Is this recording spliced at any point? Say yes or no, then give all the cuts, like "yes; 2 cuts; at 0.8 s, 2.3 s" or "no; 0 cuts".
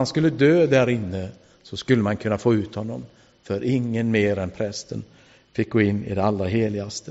no; 0 cuts